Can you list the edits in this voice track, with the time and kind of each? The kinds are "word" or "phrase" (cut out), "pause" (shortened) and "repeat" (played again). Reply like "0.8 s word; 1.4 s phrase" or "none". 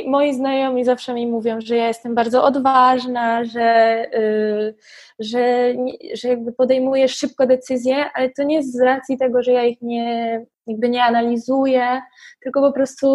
10.5 s pause

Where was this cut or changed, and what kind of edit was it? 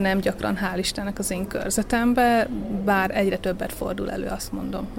none

